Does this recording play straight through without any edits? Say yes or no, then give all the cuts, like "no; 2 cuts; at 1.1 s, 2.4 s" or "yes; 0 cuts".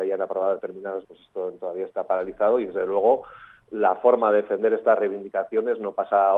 no; 1 cut; at 1.0 s